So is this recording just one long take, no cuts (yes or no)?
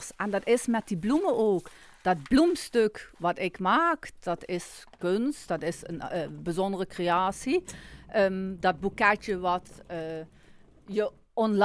yes